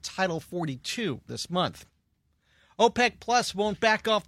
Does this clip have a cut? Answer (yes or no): yes